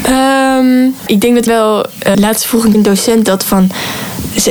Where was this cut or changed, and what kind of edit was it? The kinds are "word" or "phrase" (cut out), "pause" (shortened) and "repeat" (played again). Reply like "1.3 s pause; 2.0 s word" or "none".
1.1 s word; 1.5 s word; 2.1 s word; 2.7 s word